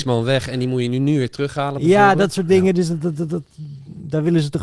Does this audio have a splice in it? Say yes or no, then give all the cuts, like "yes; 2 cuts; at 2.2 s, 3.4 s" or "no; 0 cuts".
no; 0 cuts